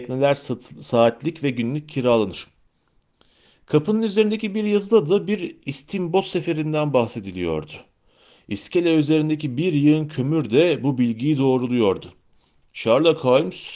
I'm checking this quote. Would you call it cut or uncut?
uncut